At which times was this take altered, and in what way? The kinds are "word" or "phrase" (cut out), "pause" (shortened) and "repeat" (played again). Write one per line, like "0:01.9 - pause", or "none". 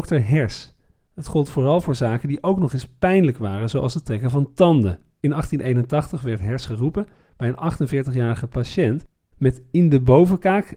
none